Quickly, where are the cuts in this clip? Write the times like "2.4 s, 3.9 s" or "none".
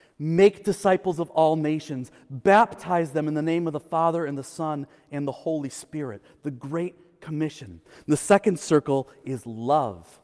none